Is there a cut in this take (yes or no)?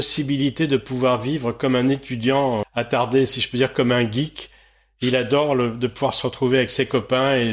yes